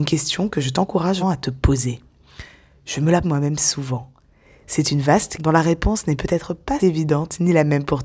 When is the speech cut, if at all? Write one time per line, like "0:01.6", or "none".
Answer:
0:01.2
0:03.2
0:05.4
0:06.8